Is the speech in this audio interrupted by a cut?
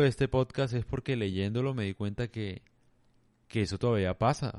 no; 0 cuts

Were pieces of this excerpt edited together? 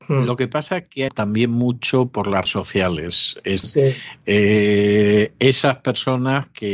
yes; 3 cuts; at 1.1 s, 2.5 s, 3.6 s

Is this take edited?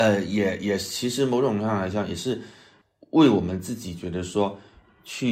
no; 0 cuts

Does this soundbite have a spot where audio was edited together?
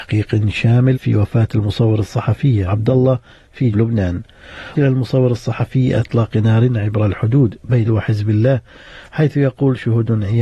yes; 6 cuts; at 0.9 s, 2.7 s, 3.7 s, 4.7 s, 6.0 s, 7.9 s

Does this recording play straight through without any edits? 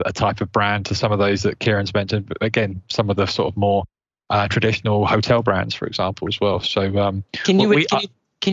yes; 0 cuts

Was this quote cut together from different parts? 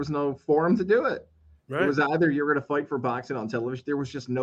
no; 0 cuts

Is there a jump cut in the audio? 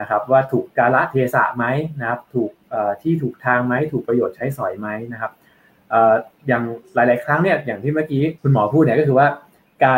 yes; 1 cut; at 8.4 s

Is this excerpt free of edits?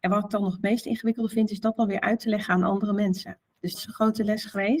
no; 1 cut; at 3.7 s

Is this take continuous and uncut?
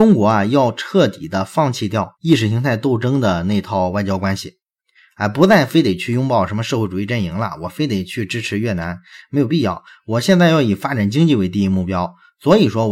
yes; 0 cuts

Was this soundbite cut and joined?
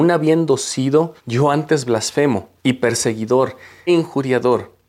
yes; 3 cuts; at 1.2 s, 2.6 s, 3.9 s

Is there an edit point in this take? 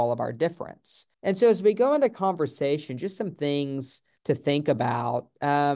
yes; 2 cuts; at 1.1 s, 4.2 s

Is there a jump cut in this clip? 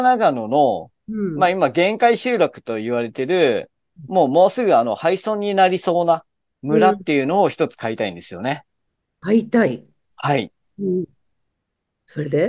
no; 0 cuts

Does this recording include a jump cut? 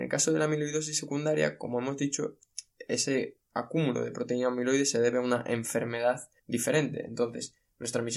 yes; 1 cut; at 6.4 s

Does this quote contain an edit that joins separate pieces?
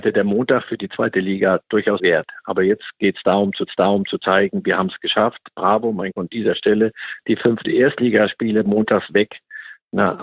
yes; 4 cuts; at 2.0 s, 3.7 s, 6.1 s, 7.6 s

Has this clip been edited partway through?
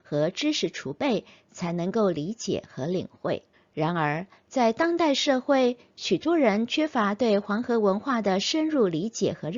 yes; 1 cut; at 3.5 s

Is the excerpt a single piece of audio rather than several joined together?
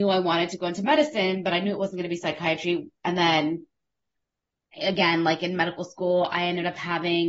yes; 0 cuts

